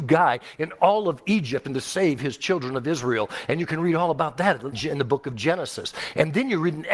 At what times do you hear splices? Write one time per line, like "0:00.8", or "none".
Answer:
0:04.7